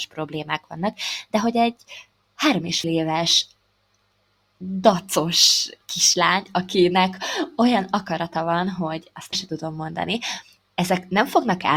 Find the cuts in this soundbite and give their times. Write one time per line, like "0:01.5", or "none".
0:02.8
0:09.3